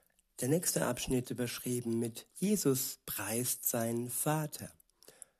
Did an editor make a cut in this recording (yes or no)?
yes